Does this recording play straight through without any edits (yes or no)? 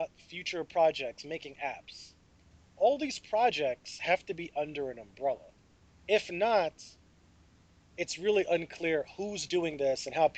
yes